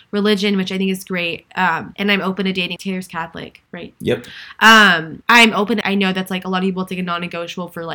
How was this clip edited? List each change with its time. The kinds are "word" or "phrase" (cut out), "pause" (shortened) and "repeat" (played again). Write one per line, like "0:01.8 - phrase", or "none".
0:01.9 - phrase
0:02.8 - word
0:03.7 - pause
0:05.2 - pause
0:05.8 - phrase